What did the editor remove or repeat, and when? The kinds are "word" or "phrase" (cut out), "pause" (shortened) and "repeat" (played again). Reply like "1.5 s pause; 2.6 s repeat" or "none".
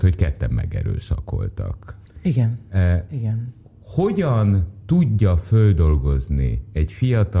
none